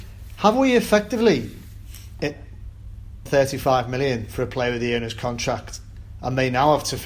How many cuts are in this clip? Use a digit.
1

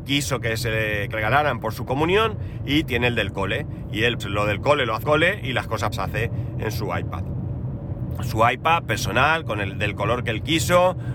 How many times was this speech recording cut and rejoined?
4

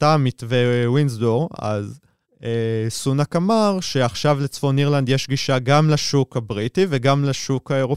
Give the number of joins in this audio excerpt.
0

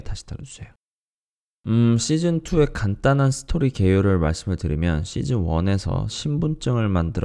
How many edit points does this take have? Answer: 1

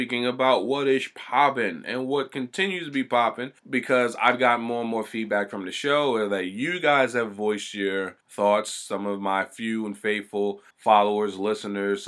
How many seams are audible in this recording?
3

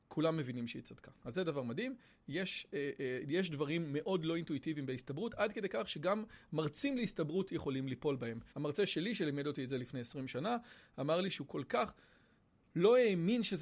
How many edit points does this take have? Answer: 1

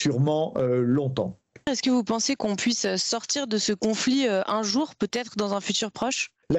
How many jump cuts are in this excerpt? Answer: 0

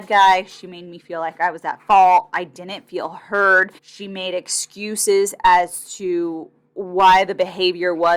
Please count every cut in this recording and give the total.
1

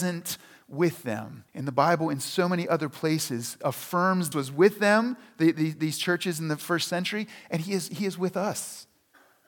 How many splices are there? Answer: 2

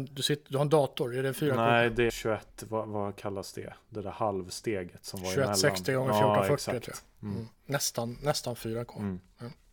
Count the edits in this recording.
3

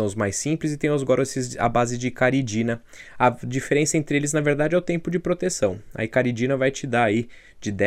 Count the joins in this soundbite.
0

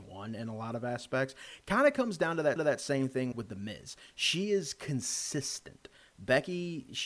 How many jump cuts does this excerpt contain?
2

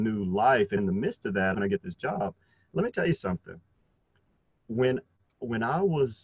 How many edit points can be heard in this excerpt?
1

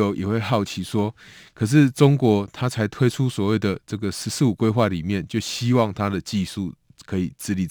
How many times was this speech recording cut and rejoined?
0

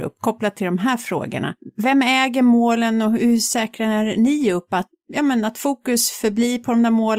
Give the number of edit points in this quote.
0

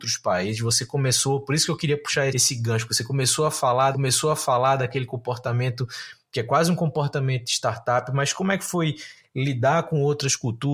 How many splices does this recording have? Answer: 2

